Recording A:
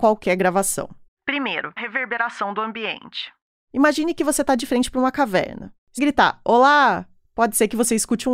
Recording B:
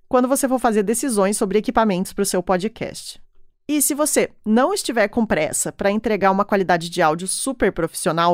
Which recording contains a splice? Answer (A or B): A